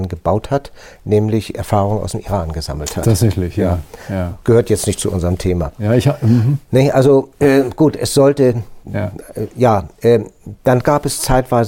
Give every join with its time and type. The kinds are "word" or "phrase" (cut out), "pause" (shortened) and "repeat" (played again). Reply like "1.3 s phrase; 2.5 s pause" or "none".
8.8 s pause